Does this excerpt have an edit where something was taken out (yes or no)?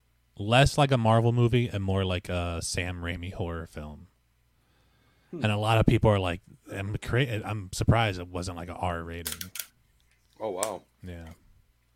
no